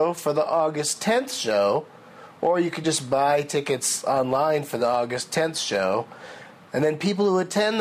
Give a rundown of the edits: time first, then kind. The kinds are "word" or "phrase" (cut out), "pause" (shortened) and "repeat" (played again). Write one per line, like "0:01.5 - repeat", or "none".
none